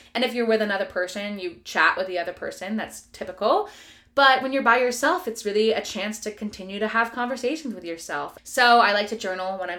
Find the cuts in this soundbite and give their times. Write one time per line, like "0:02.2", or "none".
none